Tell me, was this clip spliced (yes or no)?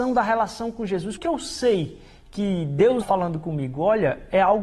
yes